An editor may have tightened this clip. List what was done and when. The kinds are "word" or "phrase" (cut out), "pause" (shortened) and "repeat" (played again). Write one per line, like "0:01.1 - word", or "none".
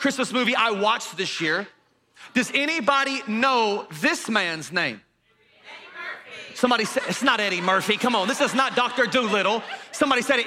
none